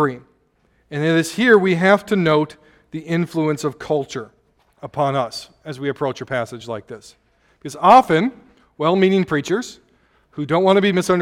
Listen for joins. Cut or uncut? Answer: uncut